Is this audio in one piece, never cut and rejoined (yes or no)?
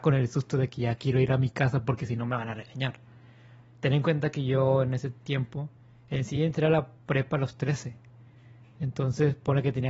yes